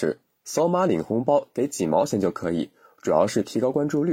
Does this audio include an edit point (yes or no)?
no